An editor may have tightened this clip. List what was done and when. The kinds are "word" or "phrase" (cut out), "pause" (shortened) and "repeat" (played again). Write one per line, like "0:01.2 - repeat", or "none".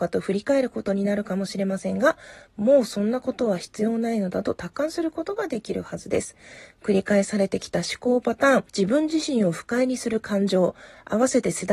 0:08.7 - pause